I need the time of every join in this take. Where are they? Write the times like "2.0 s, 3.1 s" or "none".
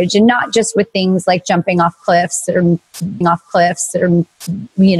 3.2 s